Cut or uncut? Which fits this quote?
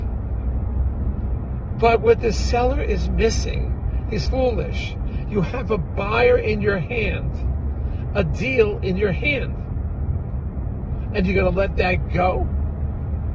cut